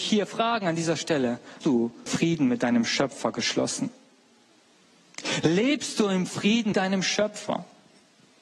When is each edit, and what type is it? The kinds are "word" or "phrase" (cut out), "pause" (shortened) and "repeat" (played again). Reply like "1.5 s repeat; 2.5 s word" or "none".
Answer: 1.6 s word; 2.1 s word; 6.7 s word